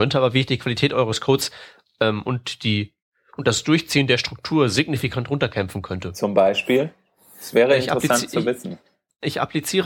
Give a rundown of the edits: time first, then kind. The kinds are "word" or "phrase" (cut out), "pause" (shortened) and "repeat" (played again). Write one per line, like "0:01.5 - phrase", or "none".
none